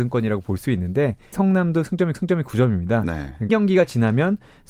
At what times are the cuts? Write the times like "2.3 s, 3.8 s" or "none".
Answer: 1.3 s, 2.1 s, 3.5 s